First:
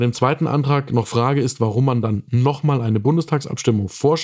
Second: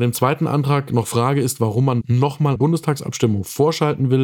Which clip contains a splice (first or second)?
second